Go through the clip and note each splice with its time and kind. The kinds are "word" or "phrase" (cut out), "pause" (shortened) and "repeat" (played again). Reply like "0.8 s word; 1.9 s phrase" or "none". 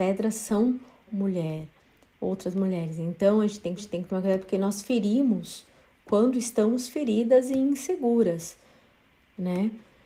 1.1 s word; 3.8 s repeat